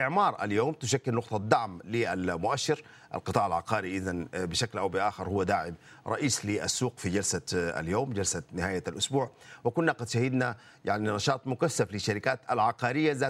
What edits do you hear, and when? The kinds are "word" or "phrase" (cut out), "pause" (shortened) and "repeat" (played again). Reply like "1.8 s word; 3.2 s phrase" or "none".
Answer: none